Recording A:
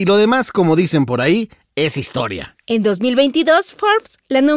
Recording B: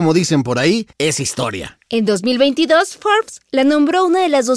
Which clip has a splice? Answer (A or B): B